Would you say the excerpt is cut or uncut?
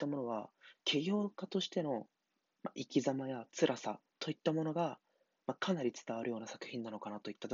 cut